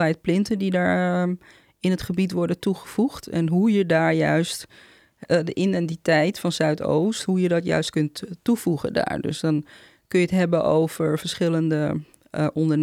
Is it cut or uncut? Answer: uncut